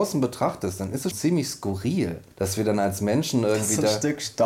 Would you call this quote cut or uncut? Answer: cut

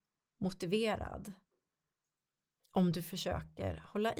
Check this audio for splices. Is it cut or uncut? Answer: uncut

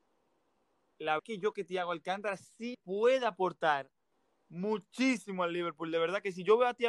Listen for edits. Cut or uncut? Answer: cut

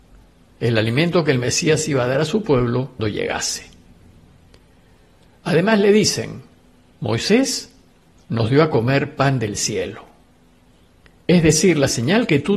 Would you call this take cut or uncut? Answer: cut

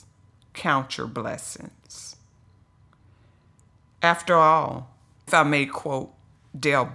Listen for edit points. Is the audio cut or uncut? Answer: cut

